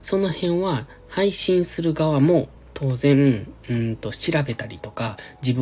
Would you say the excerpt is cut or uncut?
uncut